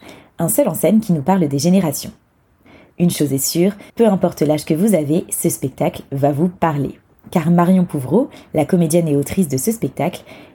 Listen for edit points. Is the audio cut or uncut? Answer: cut